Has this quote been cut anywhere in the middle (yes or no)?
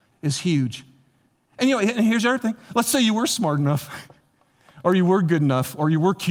no